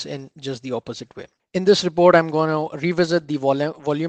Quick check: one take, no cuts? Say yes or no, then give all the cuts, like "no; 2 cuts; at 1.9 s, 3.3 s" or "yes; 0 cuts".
yes; 0 cuts